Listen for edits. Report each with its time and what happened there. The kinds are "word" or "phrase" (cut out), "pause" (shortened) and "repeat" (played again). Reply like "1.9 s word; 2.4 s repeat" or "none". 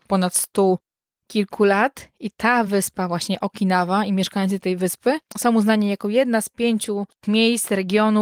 none